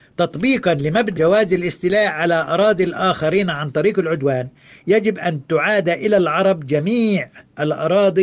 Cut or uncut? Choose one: cut